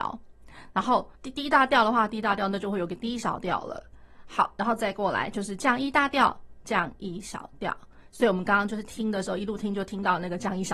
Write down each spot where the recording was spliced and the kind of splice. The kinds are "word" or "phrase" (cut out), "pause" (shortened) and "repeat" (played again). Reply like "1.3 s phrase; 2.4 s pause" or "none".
1.2 s pause